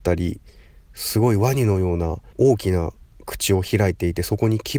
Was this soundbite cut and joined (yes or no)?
yes